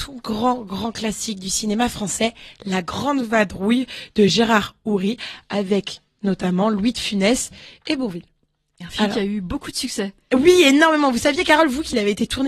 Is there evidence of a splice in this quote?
no; 0 cuts

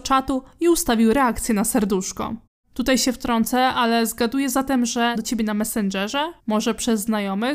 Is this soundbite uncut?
no; 3 cuts; at 2.5 s, 5.1 s, 6.4 s

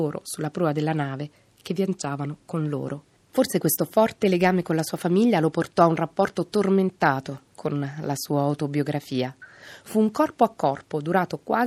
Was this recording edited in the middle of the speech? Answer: yes; 1 cut; at 3.1 s

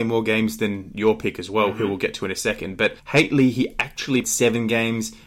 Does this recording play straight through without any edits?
no; 2 cuts; at 3.0 s, 4.2 s

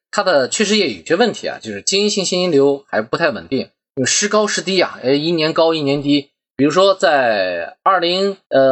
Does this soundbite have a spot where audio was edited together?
no; 0 cuts

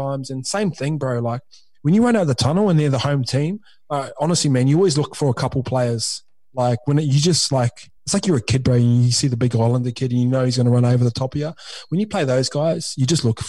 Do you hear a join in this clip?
yes; 1 cut; at 8.0 s

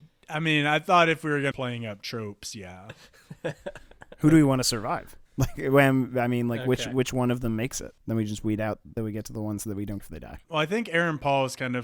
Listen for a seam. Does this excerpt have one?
yes; 5 cuts; at 1.5 s, 5.3 s, 8.0 s, 9.0 s, 10.0 s

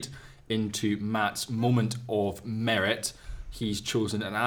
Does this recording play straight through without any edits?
yes; 0 cuts

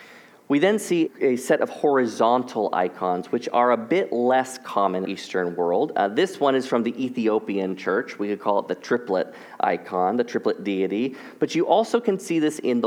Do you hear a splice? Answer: yes; 2 cuts; at 1.1 s, 5.0 s

